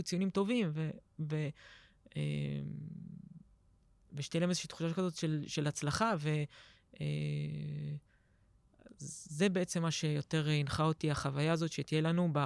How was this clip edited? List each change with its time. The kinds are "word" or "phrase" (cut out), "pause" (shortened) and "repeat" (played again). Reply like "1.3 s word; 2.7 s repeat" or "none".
none